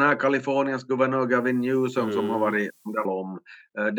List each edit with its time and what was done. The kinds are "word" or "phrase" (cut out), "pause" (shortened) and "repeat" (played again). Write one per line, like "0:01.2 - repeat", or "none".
0:03.0 - phrase